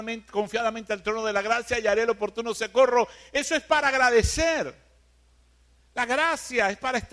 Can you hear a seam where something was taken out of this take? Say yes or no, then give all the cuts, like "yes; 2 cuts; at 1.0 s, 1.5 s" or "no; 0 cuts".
no; 0 cuts